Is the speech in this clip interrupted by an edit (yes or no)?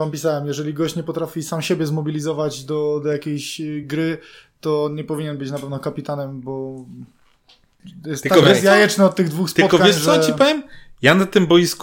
no